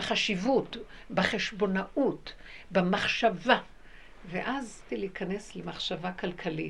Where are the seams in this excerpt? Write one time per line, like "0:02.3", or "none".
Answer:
0:04.9